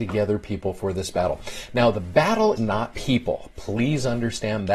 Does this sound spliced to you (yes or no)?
yes